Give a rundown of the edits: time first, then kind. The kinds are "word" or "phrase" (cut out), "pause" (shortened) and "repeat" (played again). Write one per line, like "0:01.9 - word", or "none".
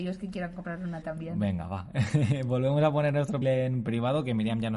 0:01.0 - word
0:03.4 - word